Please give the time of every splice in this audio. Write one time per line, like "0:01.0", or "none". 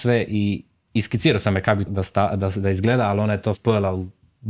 0:01.9
0:03.5